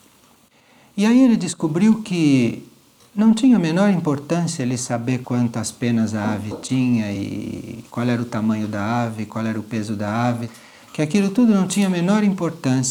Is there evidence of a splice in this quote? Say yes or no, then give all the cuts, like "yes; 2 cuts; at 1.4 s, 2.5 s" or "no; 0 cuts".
no; 0 cuts